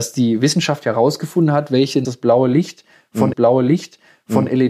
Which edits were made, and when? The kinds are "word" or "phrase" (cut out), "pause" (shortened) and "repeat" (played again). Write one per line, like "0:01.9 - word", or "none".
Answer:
0:02.0 - word
0:03.3 - repeat